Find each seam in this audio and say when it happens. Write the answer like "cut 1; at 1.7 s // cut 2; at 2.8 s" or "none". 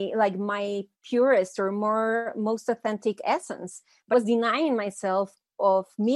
cut 1; at 0.9 s // cut 2; at 4.1 s